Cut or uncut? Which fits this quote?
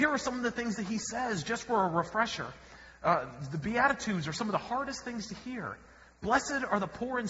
uncut